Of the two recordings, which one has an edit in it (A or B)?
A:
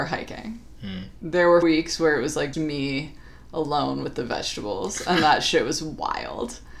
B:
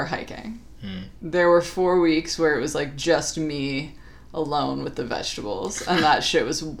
A